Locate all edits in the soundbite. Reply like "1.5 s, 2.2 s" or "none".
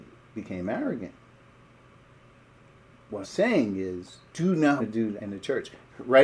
3.2 s, 4.3 s, 4.8 s, 5.2 s